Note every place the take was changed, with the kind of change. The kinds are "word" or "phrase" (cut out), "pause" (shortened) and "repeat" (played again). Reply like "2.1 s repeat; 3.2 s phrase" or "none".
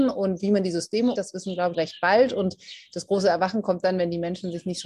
1.2 s word; 1.7 s phrase